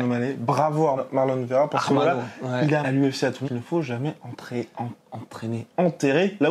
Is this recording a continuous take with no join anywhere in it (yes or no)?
no